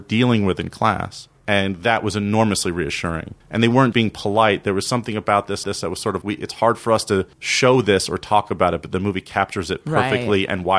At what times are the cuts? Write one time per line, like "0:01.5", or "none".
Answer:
0:01.4
0:03.4
0:03.9
0:05.6
0:06.2
0:07.3